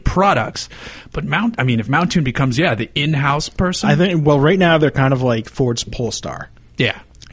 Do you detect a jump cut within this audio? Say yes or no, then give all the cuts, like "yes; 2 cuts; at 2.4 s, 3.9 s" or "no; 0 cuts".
no; 0 cuts